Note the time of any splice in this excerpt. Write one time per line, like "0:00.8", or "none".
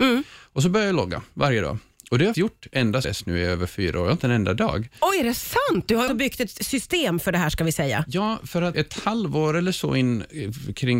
0:02.3
0:03.0
0:04.2
0:06.1
0:08.7